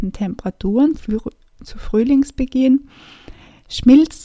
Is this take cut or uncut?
cut